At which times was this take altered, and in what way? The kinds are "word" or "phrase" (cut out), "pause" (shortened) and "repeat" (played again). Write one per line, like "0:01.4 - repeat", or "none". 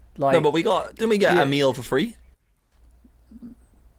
none